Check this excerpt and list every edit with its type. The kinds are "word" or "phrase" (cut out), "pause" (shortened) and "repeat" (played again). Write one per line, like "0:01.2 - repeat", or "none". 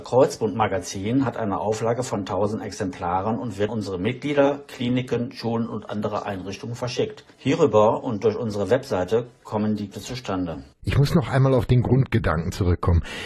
0:03.7 - word
0:07.3 - pause
0:09.9 - word
0:10.7 - pause